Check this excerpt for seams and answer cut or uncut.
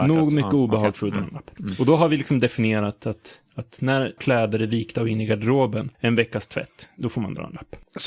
cut